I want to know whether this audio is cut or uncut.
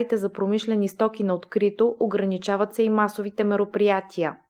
uncut